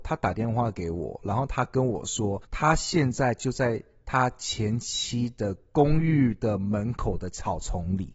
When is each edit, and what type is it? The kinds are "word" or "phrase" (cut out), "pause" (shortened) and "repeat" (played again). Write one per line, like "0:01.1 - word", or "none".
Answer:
0:02.4 - pause

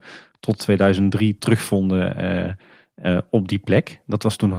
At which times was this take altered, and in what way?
0:01.4 - word

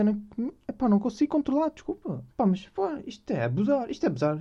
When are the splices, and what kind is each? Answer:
0:02.3 - pause

